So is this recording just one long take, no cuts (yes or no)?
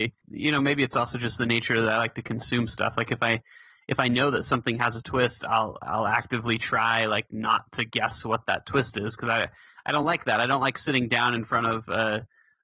yes